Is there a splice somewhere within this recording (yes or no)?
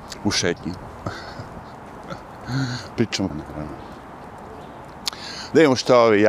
yes